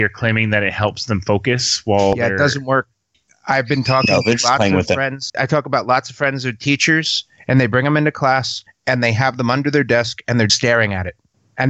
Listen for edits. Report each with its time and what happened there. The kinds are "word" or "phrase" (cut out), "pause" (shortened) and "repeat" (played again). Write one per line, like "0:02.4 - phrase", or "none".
0:05.3 - word
0:10.5 - word